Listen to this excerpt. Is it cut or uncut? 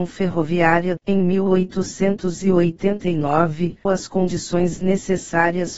cut